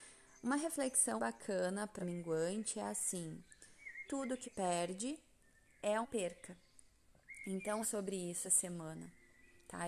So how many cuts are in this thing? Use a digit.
7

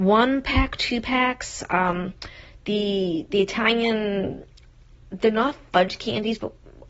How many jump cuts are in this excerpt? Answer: 0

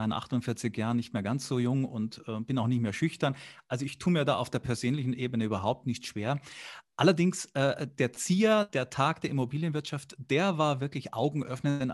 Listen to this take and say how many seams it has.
0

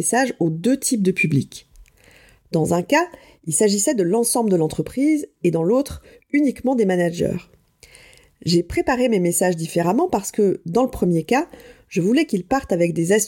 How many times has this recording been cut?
0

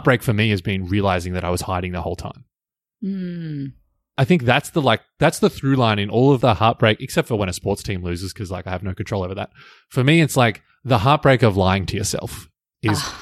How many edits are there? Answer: 0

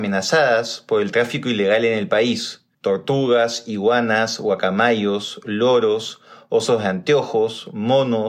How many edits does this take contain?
1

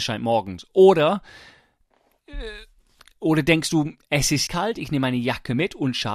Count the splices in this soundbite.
1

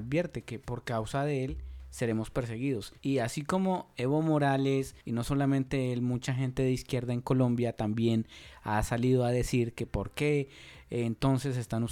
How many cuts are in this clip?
2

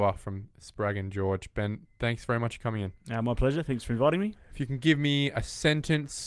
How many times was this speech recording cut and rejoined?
0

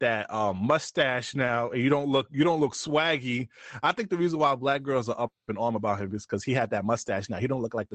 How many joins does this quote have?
0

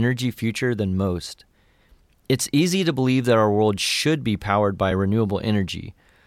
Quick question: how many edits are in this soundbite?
0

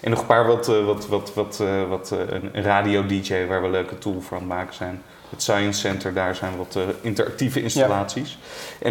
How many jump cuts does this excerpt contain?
0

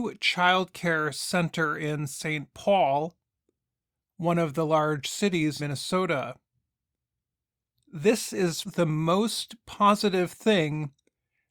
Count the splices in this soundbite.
2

